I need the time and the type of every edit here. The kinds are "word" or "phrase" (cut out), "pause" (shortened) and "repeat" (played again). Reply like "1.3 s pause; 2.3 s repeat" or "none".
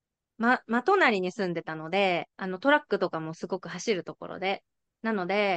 2.3 s pause